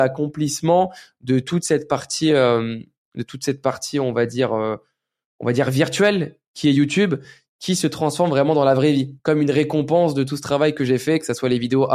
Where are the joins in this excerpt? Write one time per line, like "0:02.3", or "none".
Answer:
none